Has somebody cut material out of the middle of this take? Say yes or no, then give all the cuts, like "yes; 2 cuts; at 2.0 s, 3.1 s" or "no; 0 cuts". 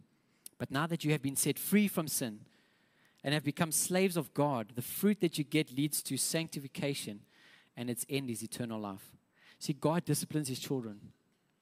no; 0 cuts